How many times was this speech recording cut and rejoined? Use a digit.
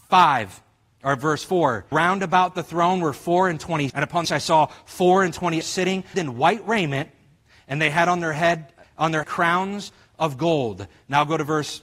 7